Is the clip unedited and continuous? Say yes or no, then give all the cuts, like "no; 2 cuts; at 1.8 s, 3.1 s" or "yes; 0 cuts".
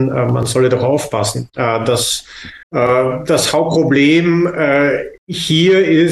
no; 2 cuts; at 2.6 s, 5.2 s